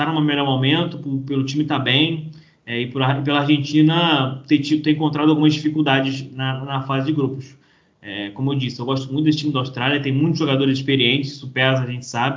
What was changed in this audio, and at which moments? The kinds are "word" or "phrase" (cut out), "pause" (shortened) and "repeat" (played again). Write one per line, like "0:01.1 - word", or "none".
none